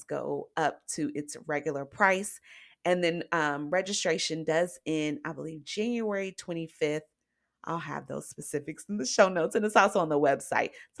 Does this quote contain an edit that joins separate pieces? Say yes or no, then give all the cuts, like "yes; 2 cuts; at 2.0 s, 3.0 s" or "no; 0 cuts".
no; 0 cuts